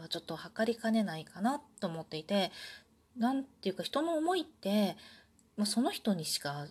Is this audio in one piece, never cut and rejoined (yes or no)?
yes